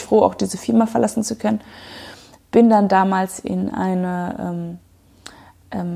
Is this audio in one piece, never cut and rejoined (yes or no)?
yes